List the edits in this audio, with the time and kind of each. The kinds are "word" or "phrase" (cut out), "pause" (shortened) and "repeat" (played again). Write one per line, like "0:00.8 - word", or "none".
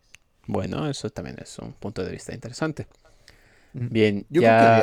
none